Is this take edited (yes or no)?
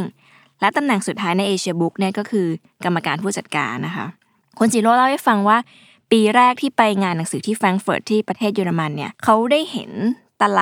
yes